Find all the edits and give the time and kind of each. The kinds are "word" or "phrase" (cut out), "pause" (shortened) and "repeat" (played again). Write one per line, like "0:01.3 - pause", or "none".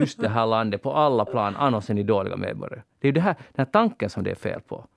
none